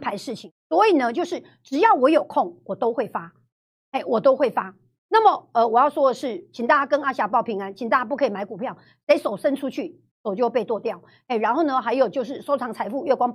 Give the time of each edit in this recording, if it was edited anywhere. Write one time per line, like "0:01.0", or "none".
none